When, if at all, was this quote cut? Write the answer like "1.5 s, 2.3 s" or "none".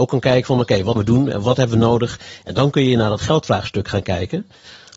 1.0 s